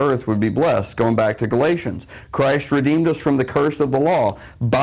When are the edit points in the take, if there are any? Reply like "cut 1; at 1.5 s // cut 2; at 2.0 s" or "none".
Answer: none